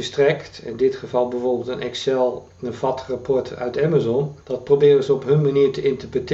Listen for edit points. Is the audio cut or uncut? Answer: cut